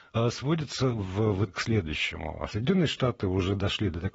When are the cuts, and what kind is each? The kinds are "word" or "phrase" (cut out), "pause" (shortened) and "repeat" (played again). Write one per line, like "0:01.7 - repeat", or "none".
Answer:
0:01.5 - word
0:02.5 - word